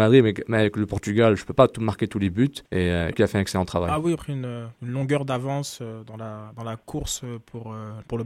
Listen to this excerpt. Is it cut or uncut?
cut